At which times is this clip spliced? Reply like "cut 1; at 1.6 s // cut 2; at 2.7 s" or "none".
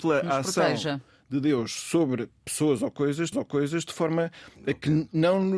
cut 1; at 3.3 s